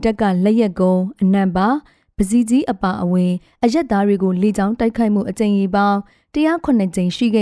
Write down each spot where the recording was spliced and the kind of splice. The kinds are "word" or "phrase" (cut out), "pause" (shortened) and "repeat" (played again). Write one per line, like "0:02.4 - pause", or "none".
none